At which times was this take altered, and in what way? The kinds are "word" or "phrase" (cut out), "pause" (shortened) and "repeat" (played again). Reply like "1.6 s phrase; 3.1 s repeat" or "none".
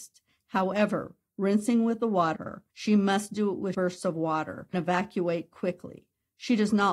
2.4 s phrase; 2.7 s pause; 3.7 s word; 4.7 s word